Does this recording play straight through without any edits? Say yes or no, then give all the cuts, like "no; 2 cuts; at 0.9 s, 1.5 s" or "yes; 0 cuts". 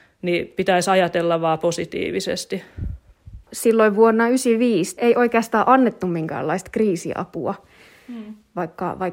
no; 2 cuts; at 3.4 s, 5.0 s